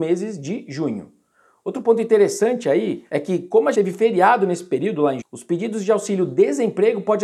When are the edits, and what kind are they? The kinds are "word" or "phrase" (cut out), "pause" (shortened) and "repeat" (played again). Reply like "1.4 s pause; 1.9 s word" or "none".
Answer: 3.7 s word; 5.2 s word